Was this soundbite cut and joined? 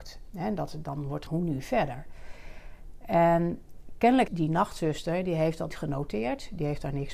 yes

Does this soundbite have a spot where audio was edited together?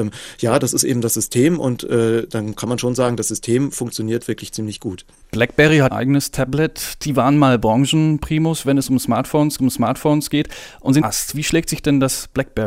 yes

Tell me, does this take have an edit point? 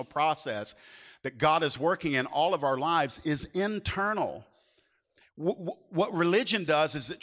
no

